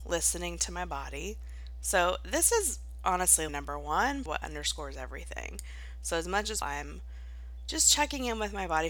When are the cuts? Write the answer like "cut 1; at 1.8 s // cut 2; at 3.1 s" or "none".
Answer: cut 1; at 3.5 s // cut 2; at 4.3 s // cut 3; at 6.6 s